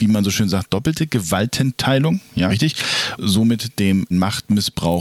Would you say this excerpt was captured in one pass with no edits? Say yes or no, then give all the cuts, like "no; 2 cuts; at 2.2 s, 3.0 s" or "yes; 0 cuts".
no; 3 cuts; at 2.5 s, 3.2 s, 4.1 s